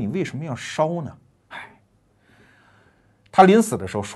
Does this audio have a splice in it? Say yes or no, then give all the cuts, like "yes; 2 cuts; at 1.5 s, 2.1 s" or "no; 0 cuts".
no; 0 cuts